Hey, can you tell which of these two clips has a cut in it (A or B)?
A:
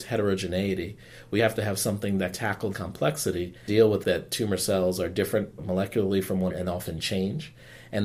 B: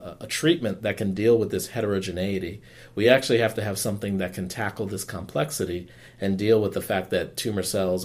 A